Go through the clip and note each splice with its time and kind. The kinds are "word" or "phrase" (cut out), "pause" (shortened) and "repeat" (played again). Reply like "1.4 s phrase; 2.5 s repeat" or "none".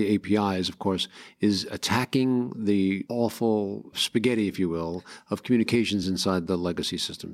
none